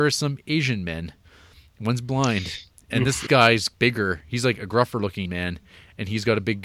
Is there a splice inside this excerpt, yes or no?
yes